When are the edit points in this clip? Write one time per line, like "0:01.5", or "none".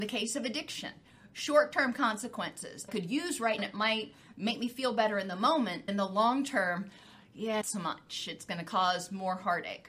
0:02.9
0:03.6
0:05.9
0:07.6